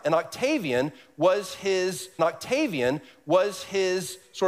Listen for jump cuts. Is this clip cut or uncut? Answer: cut